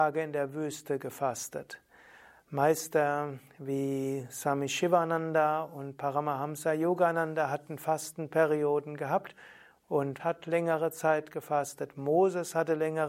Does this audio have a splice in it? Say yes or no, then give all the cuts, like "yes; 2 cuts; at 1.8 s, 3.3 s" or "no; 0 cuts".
yes; 1 cut; at 10.2 s